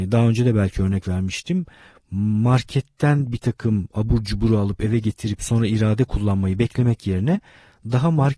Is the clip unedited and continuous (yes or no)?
yes